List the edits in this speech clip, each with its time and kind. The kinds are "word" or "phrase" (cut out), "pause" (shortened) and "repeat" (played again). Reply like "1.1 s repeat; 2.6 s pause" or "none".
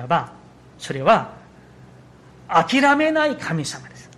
none